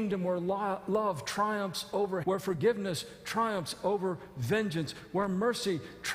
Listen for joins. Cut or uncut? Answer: cut